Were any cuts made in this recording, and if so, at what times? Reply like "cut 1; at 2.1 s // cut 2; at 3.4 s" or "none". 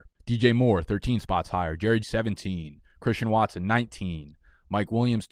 cut 1; at 2.0 s